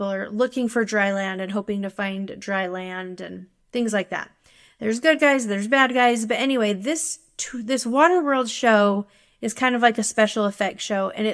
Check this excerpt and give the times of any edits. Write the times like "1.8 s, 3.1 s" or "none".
none